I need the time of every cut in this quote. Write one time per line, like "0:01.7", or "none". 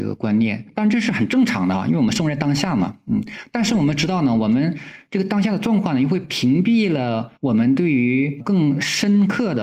0:07.4